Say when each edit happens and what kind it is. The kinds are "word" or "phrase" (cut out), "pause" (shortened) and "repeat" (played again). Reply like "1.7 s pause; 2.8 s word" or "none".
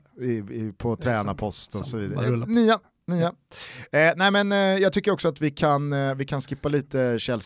none